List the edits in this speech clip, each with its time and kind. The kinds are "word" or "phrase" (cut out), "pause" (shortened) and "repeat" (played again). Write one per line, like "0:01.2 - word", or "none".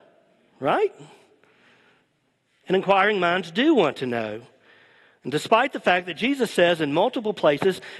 none